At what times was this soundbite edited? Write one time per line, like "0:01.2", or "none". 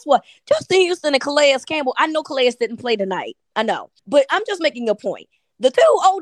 0:04.0